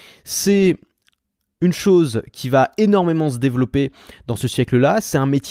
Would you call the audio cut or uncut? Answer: uncut